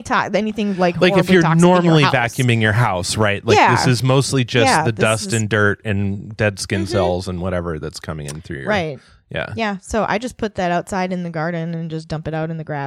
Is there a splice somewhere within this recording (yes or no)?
no